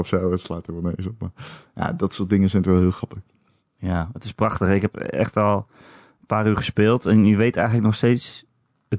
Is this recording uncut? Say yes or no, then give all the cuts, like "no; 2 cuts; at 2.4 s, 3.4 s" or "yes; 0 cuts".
yes; 0 cuts